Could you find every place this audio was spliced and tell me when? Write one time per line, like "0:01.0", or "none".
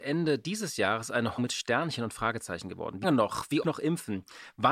0:01.4
0:03.0
0:03.6